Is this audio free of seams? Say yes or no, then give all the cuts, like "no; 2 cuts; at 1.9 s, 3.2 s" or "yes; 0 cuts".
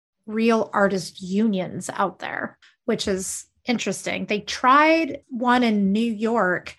no; 2 cuts; at 2.6 s, 5.2 s